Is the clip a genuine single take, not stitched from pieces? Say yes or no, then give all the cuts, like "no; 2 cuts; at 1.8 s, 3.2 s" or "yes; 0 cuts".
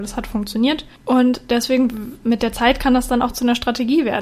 no; 2 cuts; at 0.9 s, 2.2 s